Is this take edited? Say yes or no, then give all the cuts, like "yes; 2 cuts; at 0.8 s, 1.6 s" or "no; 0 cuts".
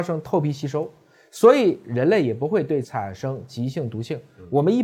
yes; 1 cut; at 2.8 s